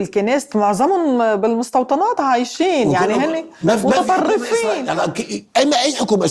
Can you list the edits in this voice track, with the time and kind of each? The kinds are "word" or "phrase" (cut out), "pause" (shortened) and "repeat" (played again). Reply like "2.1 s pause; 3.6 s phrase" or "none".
none